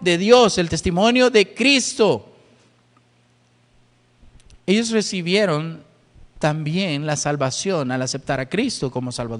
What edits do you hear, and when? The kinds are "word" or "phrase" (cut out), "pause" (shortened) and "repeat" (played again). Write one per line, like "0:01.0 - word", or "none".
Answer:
none